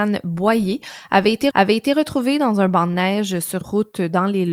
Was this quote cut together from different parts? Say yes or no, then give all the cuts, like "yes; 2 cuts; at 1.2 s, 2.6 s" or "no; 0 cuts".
yes; 2 cuts; at 1.5 s, 3.6 s